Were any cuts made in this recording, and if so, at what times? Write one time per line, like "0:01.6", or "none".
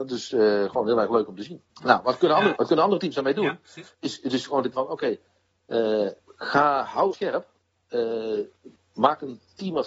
0:01.7
0:02.6
0:03.9
0:04.7
0:06.2
0:07.1